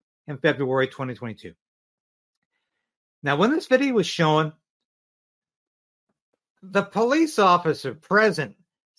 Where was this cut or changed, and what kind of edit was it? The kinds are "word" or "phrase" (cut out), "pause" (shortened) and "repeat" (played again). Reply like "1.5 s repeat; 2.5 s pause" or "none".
none